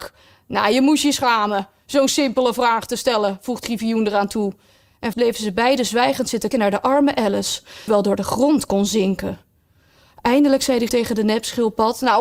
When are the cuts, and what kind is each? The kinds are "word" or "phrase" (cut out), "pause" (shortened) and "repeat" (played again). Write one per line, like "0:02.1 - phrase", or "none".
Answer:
0:03.6 - word
0:05.1 - word
0:06.5 - word
0:07.9 - word
0:10.9 - word